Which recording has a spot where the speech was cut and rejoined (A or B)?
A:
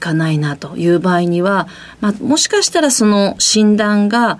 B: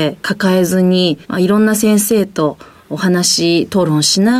B